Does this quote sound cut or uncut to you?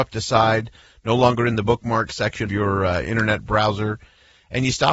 cut